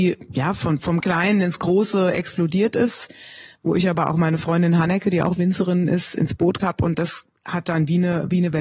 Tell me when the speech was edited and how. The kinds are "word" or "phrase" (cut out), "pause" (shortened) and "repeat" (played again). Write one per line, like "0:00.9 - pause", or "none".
0:01.0 - word
0:06.6 - word